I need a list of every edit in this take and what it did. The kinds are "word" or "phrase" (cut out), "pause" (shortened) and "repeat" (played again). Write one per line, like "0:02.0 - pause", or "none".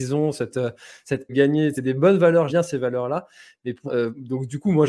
0:01.3 - phrase
0:01.7 - word
0:02.5 - word
0:03.9 - word